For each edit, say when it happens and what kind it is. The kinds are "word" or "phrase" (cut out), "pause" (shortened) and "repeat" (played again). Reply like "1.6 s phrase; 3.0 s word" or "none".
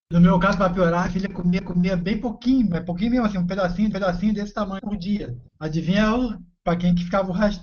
1.1 s word; 1.6 s repeat; 3.9 s repeat; 4.8 s word; 5.5 s pause